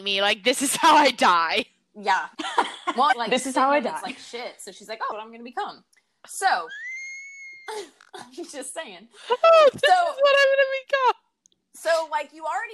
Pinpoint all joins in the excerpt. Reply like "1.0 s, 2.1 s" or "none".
2.3 s, 3.1 s, 5.1 s